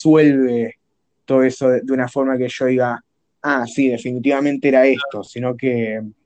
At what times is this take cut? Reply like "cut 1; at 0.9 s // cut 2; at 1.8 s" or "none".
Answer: none